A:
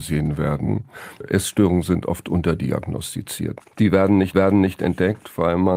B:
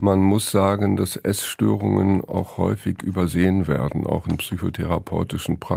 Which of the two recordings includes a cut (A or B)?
A